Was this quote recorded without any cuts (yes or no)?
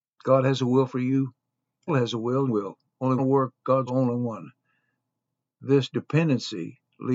no